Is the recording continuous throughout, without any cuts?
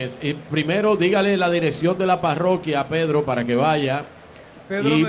yes; 0 cuts

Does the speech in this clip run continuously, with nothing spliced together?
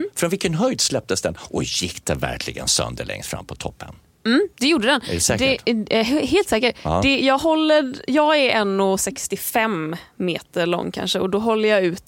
yes; 0 cuts

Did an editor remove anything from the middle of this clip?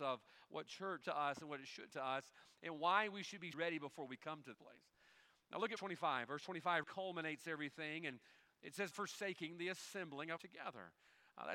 yes; 8 cuts; at 1.0 s, 1.9 s, 3.5 s, 4.5 s, 5.8 s, 6.8 s, 8.9 s, 10.4 s

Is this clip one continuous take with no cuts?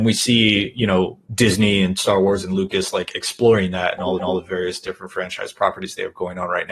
no; 2 cuts; at 1.2 s, 4.2 s

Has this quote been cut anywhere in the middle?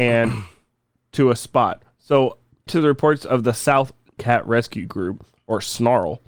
yes; 3 cuts; at 1.0 s, 2.7 s, 4.2 s

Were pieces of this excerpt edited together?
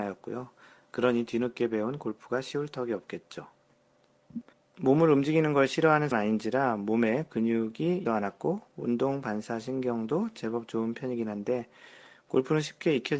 yes; 3 cuts; at 4.5 s, 6.1 s, 8.1 s

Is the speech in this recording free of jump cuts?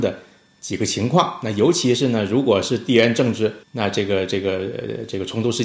no; 1 cut; at 3.6 s

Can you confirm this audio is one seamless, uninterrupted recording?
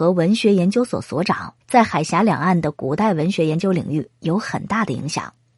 no; 1 cut; at 1.6 s

